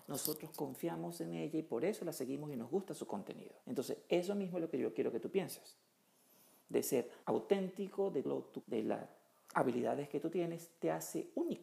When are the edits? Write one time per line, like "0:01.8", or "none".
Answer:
0:03.6
0:07.2
0:08.2
0:08.6